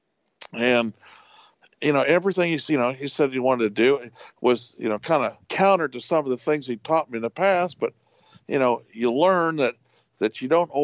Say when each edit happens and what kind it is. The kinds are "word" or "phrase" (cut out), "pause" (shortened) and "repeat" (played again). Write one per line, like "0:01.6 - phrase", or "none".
0:05.4 - pause